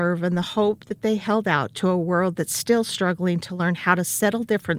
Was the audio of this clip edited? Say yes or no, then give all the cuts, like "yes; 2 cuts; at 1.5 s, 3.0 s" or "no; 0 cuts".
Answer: no; 0 cuts